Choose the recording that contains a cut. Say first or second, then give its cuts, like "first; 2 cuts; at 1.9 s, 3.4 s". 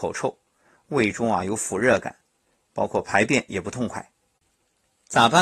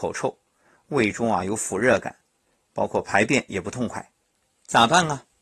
second; 1 cut; at 4.2 s